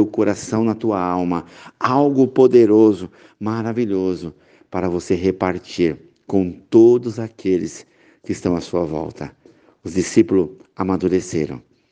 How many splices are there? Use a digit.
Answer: 0